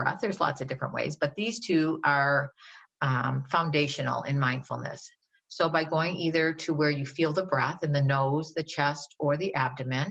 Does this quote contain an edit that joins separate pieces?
no; 0 cuts

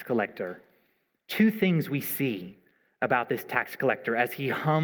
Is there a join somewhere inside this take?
no; 0 cuts

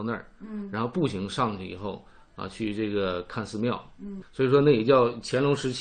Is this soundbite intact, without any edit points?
no; 1 cut; at 4.2 s

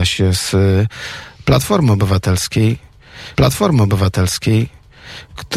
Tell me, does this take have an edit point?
yes; 1 cut; at 3.3 s

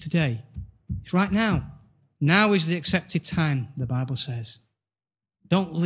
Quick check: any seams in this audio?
no; 0 cuts

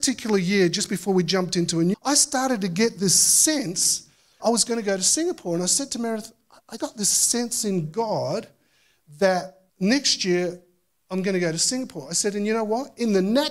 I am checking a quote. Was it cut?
yes; 4 cuts; at 1.9 s, 4.4 s, 6.8 s, 9.7 s

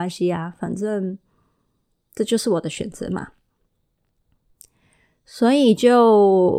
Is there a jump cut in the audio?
no; 0 cuts

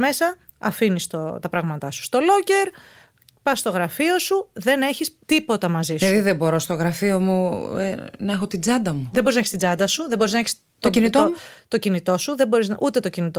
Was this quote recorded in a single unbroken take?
no; 1 cut; at 5.2 s

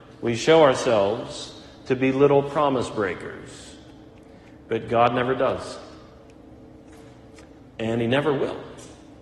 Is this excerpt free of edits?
yes; 0 cuts

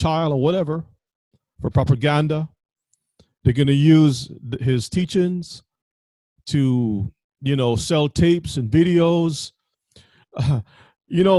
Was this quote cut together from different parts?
no; 0 cuts

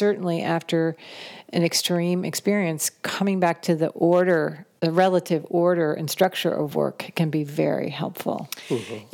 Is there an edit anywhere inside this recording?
no; 0 cuts

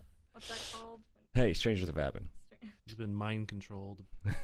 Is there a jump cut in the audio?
yes; 3 cuts; at 1.3 s, 1.9 s, 2.8 s

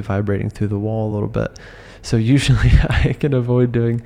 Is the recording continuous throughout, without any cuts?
yes; 0 cuts

